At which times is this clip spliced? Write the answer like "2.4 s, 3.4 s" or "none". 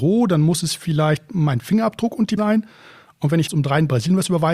2.4 s, 3.5 s